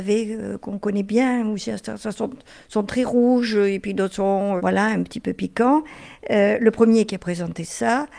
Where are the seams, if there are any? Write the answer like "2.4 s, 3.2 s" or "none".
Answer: 4.6 s

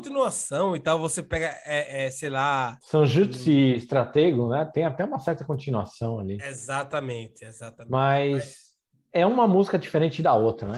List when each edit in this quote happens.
2.8 s

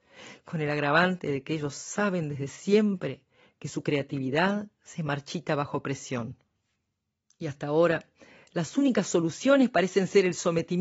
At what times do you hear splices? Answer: none

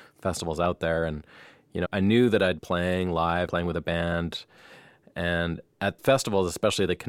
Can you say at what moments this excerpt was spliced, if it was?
1.8 s, 2.6 s, 3.5 s, 6.0 s

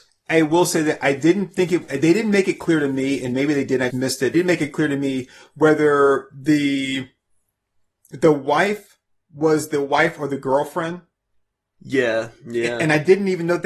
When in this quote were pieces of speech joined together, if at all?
3.9 s, 4.3 s

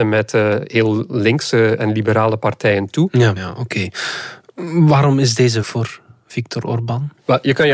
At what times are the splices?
3.4 s, 5.6 s

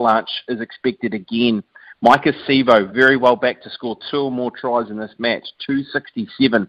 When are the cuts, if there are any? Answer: none

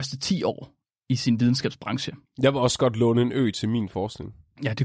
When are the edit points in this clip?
2.2 s

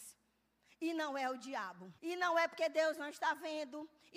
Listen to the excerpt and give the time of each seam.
2.0 s

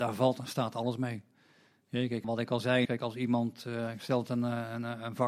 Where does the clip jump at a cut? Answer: 2.2 s, 2.9 s

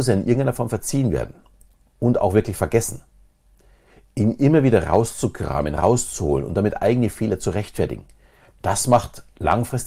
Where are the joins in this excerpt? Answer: none

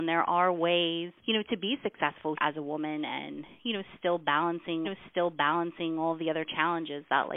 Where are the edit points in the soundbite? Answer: 1.2 s, 2.4 s, 4.8 s

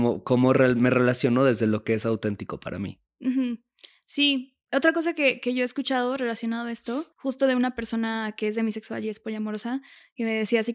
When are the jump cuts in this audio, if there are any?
7.1 s

